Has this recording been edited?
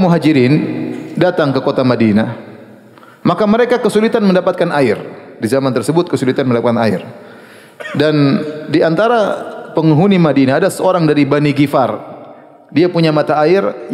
no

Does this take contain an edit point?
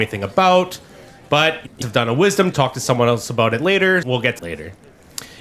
yes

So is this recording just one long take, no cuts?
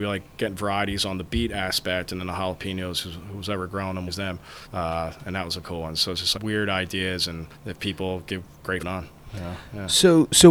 no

